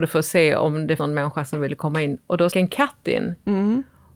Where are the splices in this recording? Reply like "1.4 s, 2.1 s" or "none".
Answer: 1.0 s, 2.5 s